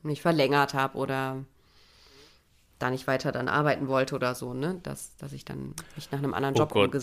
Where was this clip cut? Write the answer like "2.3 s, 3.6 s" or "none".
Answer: none